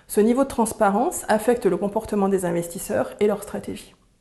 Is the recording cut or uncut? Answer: uncut